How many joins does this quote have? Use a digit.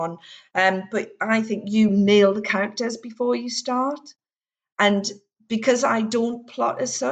0